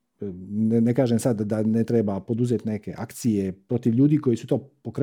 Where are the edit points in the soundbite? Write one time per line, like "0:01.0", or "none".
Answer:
none